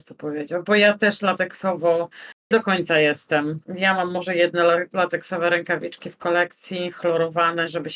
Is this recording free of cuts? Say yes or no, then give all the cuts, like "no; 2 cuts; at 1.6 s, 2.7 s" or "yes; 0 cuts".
no; 2 cuts; at 2.5 s, 3.6 s